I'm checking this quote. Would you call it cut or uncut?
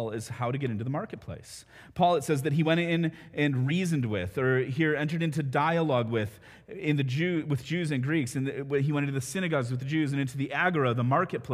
uncut